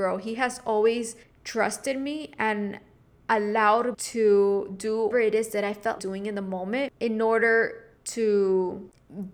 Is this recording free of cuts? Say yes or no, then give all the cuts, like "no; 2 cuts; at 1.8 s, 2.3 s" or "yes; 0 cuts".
no; 6 cuts; at 1.2 s, 3.9 s, 5.1 s, 6.0 s, 7.0 s, 8.0 s